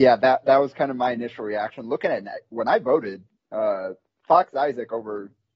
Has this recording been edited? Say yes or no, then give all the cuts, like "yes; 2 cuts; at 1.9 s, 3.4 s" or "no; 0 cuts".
no; 0 cuts